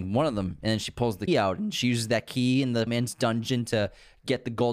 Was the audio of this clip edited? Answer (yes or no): yes